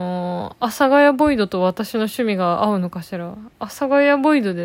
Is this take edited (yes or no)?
no